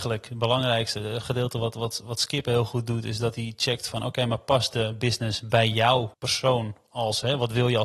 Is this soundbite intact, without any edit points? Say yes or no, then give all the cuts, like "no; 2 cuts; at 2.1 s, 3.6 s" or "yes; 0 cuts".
no; 1 cut; at 6.1 s